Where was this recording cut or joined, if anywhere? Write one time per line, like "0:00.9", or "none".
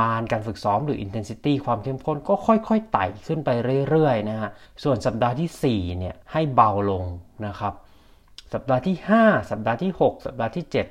0:04.6
0:06.2